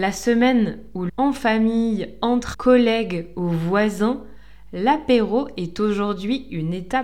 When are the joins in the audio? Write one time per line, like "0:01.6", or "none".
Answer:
0:01.1
0:02.5